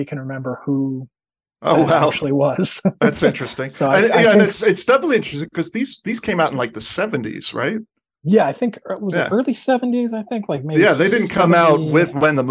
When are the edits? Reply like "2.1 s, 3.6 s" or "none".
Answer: none

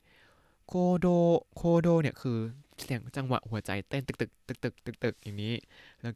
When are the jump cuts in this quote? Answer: 1.5 s

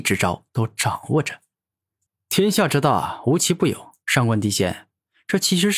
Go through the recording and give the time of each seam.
2.1 s, 4.0 s

